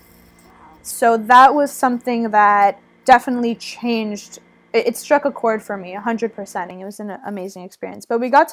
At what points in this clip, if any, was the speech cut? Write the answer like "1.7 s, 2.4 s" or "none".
none